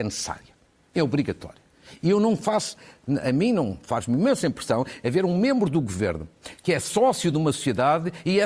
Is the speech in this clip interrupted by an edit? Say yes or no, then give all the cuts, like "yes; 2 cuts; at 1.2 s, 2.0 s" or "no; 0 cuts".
no; 0 cuts